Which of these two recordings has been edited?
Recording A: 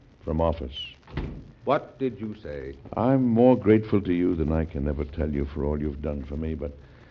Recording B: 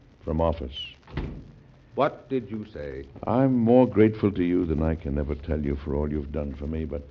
A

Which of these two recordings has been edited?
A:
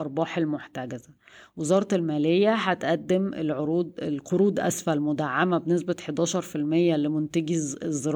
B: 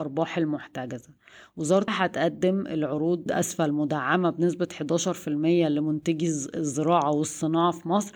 B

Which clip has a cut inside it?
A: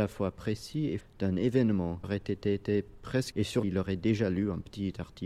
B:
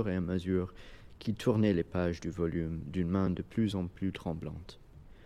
A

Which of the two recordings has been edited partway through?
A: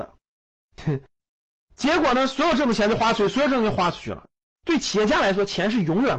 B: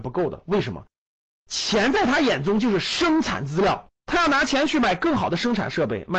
B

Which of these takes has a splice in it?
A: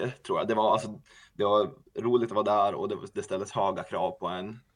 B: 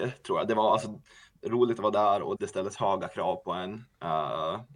B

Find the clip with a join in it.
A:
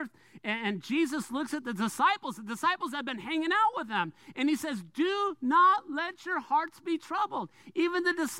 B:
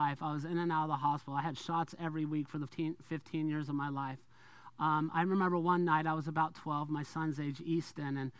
B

